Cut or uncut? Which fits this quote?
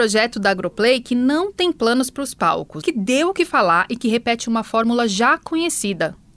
cut